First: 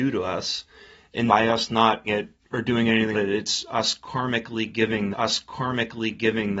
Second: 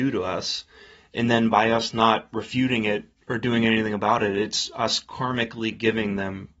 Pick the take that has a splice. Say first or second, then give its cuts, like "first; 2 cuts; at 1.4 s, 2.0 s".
first; 4 cuts; at 1.3 s, 2.1 s, 3.1 s, 5.1 s